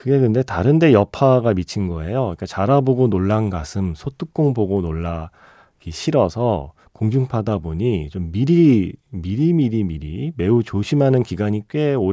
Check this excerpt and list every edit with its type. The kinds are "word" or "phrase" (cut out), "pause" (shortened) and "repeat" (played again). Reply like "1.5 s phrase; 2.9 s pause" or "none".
none